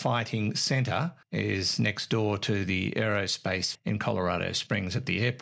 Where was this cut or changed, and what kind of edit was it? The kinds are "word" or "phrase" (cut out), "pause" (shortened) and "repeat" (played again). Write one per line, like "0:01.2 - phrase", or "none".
0:01.2 - pause
0:03.7 - word